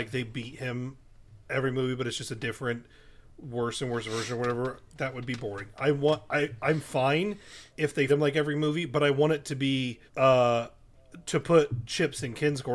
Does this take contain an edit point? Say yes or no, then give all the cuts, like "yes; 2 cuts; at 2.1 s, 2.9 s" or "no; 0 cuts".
yes; 2 cuts; at 8.1 s, 10.1 s